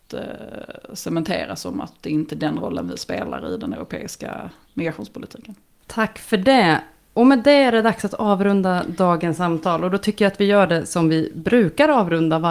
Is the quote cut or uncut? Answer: uncut